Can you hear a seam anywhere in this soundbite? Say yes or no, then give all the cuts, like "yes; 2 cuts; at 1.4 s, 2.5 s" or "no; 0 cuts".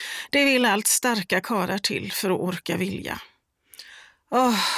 no; 0 cuts